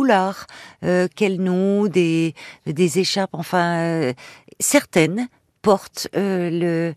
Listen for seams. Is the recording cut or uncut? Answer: uncut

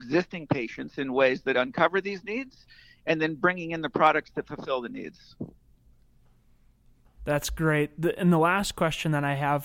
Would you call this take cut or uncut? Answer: uncut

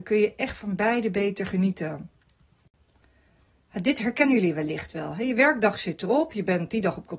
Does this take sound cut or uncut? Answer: uncut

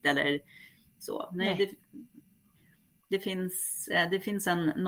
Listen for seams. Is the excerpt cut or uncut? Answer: uncut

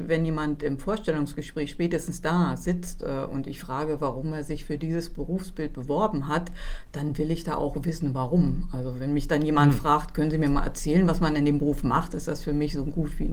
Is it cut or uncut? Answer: uncut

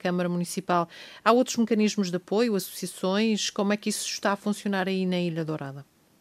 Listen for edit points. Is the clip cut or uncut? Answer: uncut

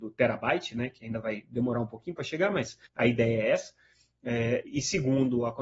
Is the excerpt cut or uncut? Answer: cut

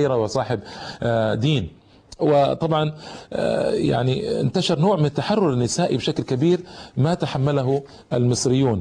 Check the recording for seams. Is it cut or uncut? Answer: uncut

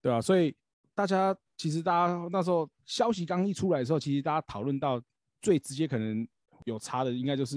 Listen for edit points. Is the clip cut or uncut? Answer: cut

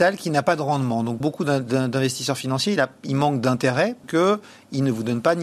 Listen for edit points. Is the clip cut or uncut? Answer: cut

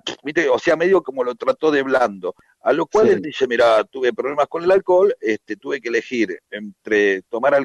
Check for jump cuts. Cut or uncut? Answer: cut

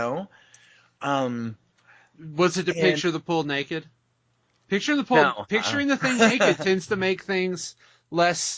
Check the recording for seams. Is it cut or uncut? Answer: uncut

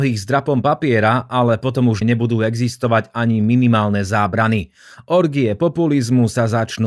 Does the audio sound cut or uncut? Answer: cut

